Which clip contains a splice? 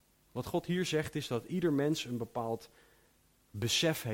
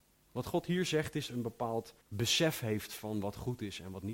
second; 2 cuts; at 1.3 s, 2.0 s

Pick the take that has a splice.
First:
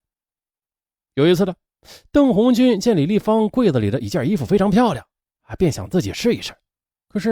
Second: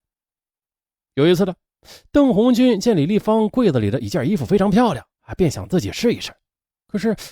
second; 1 cut; at 5.1 s

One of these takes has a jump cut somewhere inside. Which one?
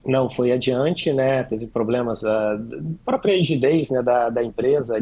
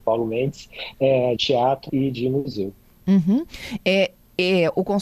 second; 2 cuts; at 1.4 s, 1.9 s

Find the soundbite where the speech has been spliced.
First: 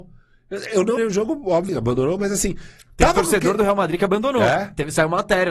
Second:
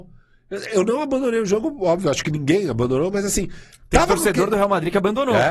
first; 2 cuts; at 1.0 s, 1.7 s

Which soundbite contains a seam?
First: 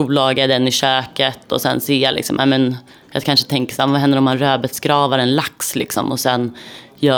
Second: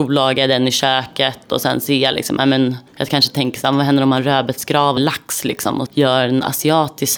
second; 3 cuts; at 2.9 s, 5.0 s, 5.9 s

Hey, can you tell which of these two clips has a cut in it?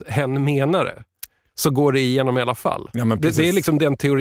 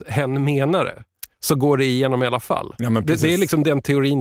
second; 1 cut; at 1.3 s

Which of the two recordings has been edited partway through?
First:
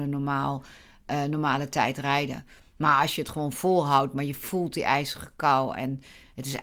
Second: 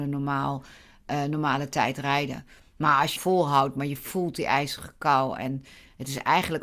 second; 1 cut; at 3.2 s

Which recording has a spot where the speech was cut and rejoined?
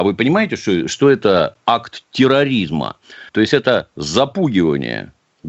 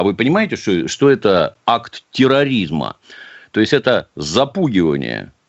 first; 1 cut; at 3.3 s

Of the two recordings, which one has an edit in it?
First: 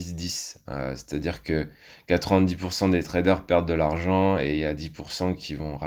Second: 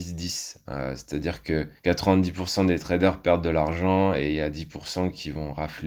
second; 1 cut; at 1.8 s

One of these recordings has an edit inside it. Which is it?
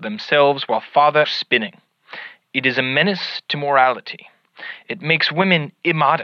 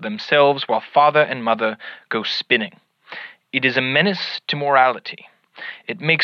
first; 1 cut; at 1.2 s

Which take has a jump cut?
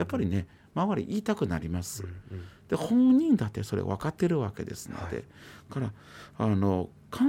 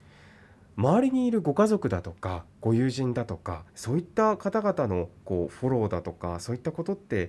second; 1 cut; at 3.7 s

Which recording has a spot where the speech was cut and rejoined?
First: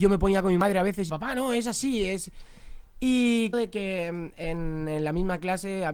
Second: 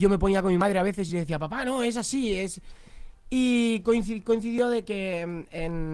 first; 2 cuts; at 1.1 s, 3.5 s

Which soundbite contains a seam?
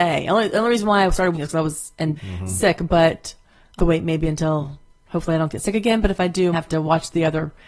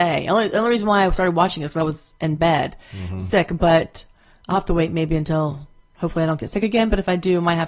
first; 4 cuts; at 1.3 s, 2.2 s, 3.8 s, 6.5 s

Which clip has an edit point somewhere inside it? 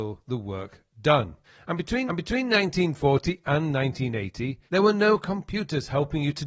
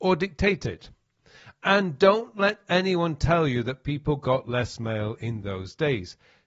first; 4 cuts; at 0.9 s, 1.4 s, 2.1 s, 4.7 s

